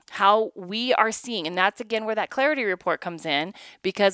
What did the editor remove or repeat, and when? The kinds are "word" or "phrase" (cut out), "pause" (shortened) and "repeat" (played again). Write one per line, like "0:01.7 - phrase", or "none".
none